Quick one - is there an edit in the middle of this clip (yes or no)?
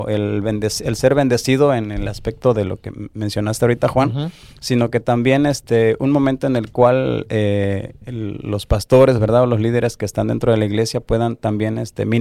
no